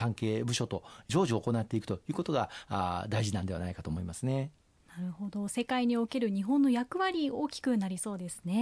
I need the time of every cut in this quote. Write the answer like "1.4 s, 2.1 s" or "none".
none